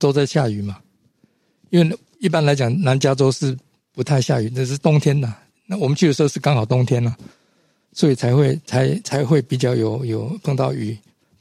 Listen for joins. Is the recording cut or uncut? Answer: uncut